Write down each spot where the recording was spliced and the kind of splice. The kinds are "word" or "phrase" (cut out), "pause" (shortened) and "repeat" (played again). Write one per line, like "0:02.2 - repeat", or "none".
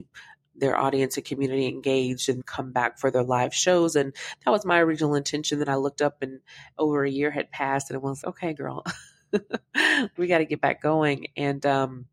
0:02.4 - word
0:08.2 - word
0:10.2 - word